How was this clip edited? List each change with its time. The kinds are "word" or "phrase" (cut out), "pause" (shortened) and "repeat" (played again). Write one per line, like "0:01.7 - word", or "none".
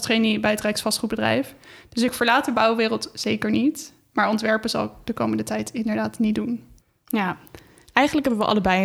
0:06.8 - pause